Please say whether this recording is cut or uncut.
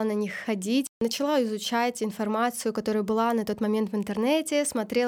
uncut